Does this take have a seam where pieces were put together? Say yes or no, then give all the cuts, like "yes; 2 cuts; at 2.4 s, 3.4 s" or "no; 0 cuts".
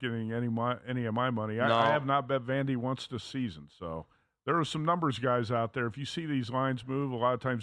no; 0 cuts